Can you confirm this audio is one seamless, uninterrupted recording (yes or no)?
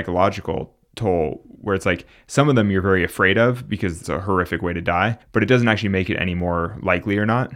no